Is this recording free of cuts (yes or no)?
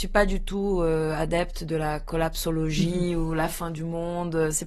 yes